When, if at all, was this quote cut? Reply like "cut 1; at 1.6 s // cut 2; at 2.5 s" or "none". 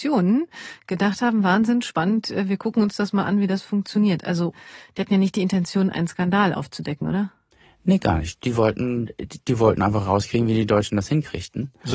none